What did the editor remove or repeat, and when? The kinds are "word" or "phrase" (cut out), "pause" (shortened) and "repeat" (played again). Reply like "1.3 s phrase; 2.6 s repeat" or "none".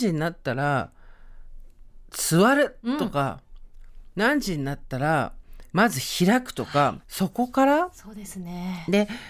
5.7 s pause; 7.0 s pause